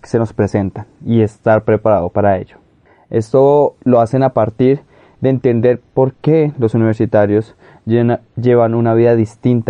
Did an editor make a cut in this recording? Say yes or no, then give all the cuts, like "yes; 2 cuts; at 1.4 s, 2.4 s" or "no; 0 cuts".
no; 0 cuts